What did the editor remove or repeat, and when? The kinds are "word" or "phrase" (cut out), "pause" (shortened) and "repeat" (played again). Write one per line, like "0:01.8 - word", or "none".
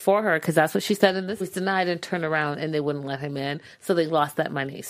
0:01.4 - phrase